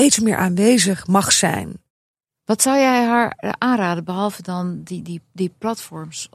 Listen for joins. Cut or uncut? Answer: uncut